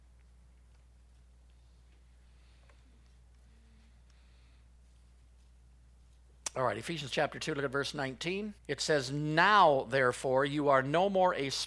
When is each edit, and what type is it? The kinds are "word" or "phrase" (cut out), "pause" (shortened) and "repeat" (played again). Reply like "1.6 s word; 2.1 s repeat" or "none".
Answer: 8.6 s pause